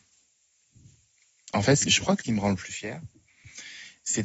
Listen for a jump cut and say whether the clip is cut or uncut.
cut